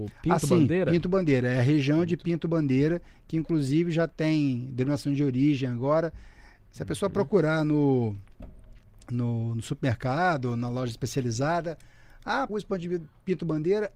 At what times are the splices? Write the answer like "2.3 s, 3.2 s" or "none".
12.5 s